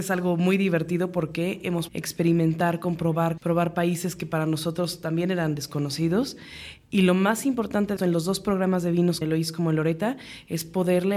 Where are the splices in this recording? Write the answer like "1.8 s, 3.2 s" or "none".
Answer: 1.9 s, 3.4 s, 8.0 s, 9.2 s